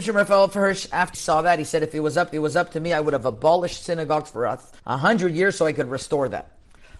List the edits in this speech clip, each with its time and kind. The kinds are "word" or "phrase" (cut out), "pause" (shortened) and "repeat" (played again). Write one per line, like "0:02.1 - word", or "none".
0:01.1 - word
0:02.3 - repeat
0:04.8 - pause